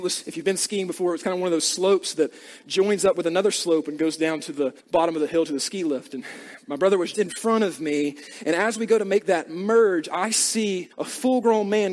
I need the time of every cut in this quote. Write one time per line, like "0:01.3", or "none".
0:04.8
0:07.1
0:10.9